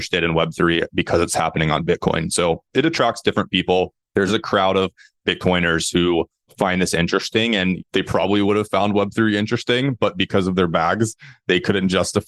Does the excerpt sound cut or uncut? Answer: uncut